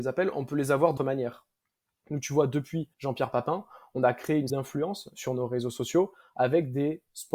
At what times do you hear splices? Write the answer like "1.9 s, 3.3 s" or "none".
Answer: 1.0 s, 2.9 s, 4.5 s